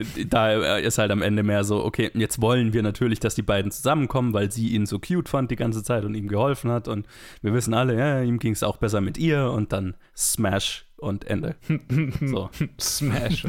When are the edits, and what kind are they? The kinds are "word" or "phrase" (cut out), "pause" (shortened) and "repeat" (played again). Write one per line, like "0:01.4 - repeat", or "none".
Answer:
0:10.0 - pause

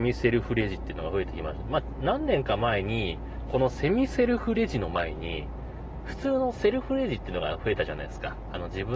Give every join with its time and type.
0:03.5 - phrase

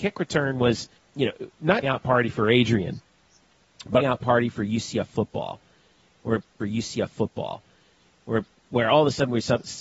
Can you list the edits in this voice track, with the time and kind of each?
0:01.0 - pause
0:01.8 - phrase
0:04.0 - phrase
0:06.6 - repeat

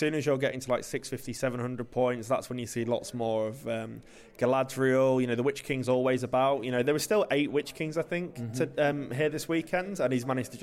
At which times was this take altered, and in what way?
none

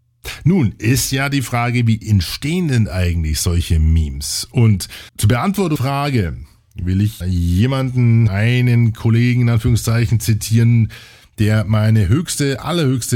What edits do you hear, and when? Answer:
0:05.1 - pause
0:05.8 - word
0:07.2 - word
0:08.3 - phrase

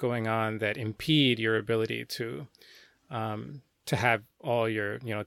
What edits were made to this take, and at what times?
none

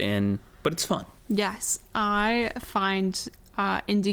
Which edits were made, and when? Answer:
0:01.2 - pause

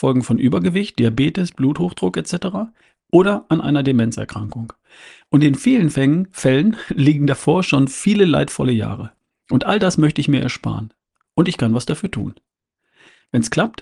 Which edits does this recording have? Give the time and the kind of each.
none

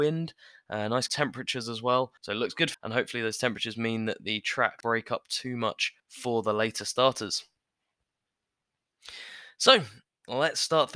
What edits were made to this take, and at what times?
0:01.1 - word
0:02.2 - pause
0:02.7 - word
0:04.8 - word
0:06.0 - pause

